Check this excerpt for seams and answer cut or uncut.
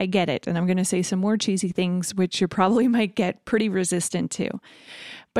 uncut